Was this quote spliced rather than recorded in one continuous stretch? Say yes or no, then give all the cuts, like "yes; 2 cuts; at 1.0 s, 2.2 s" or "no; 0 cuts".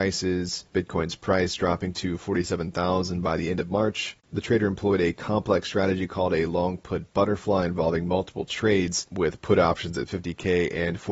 no; 0 cuts